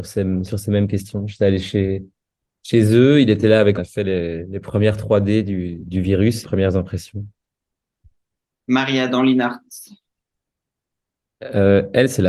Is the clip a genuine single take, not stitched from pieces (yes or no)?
no